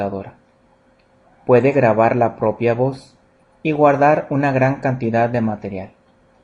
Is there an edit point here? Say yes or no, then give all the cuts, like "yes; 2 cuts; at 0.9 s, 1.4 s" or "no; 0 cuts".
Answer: no; 0 cuts